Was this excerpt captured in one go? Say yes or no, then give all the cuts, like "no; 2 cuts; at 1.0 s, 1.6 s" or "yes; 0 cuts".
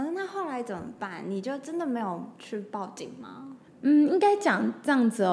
no; 1 cut; at 3.7 s